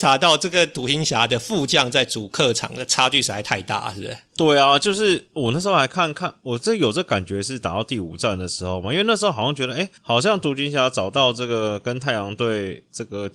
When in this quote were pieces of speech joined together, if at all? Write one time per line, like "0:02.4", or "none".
0:10.0